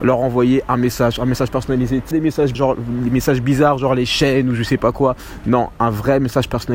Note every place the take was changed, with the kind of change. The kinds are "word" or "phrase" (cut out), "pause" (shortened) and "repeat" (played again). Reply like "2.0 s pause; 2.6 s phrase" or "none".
2.1 s word; 2.5 s word